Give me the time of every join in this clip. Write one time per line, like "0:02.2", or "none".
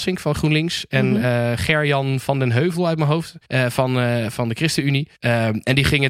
0:03.4
0:05.1

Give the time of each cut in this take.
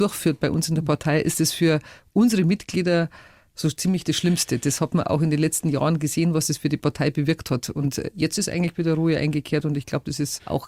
none

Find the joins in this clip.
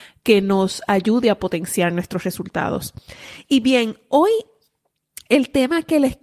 none

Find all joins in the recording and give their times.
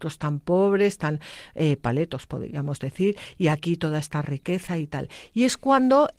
none

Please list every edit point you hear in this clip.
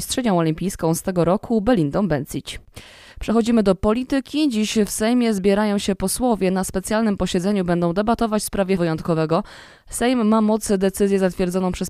0:08.8

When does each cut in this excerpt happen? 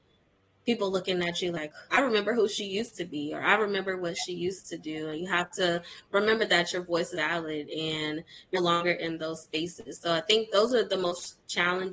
0:01.9
0:07.1
0:08.5

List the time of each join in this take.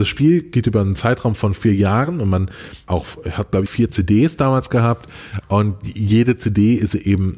0:02.9
0:03.7

